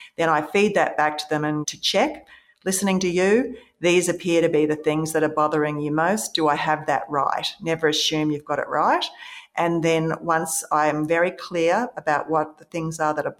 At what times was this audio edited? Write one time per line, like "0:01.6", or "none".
none